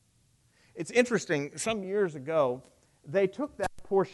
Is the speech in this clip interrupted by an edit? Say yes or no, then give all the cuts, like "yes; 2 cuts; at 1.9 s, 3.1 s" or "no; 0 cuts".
no; 0 cuts